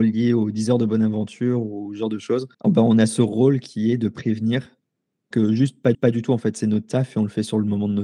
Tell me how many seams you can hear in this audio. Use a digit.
3